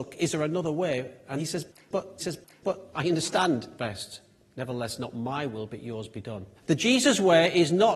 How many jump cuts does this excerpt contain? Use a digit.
4